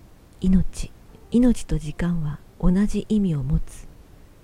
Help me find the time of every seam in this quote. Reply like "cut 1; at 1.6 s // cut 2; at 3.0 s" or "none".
cut 1; at 1.2 s // cut 2; at 2.5 s